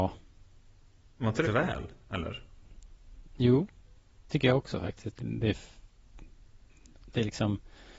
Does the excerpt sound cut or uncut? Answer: cut